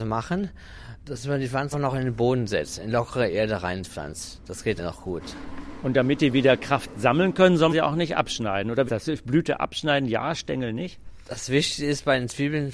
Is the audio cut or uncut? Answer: cut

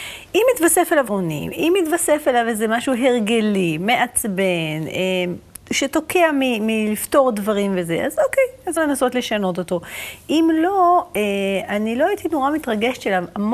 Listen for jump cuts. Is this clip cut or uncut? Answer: cut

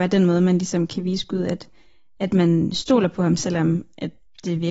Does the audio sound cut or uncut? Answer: uncut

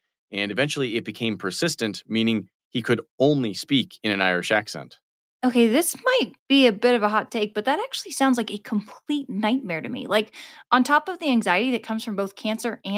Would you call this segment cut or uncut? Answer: cut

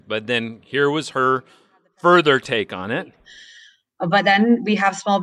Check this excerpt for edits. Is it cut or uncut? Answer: uncut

